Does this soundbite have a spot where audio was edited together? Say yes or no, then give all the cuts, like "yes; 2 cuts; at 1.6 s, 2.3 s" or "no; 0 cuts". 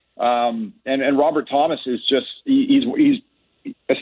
no; 0 cuts